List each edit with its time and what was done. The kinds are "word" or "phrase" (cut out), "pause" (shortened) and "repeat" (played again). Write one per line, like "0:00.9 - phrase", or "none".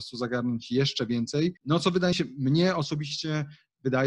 0:01.6 - pause
0:02.1 - word